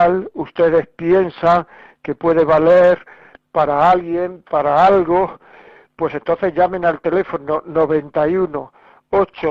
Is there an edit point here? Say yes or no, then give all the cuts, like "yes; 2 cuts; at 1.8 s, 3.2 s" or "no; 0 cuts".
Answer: no; 0 cuts